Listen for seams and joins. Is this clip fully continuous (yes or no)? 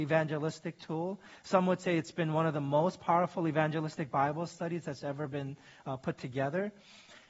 yes